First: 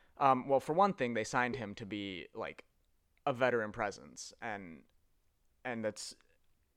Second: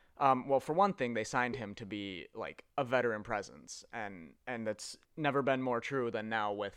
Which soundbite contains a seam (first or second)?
second